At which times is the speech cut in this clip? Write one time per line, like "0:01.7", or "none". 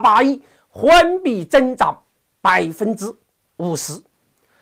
none